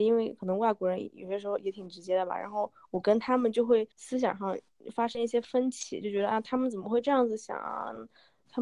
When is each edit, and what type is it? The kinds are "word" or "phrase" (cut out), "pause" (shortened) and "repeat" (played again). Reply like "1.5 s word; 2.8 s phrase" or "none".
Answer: 3.9 s pause